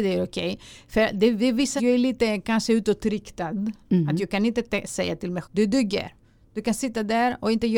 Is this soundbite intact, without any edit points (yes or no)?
no